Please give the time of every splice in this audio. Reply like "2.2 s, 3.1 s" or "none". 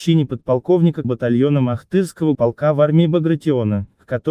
1.0 s, 2.3 s